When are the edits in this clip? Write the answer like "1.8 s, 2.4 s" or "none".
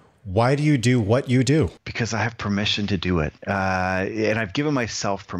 3.4 s